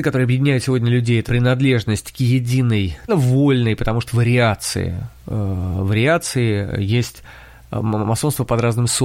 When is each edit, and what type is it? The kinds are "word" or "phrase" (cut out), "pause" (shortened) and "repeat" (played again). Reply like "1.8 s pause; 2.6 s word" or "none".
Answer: 1.3 s word; 3.1 s phrase; 4.1 s word; 5.2 s pause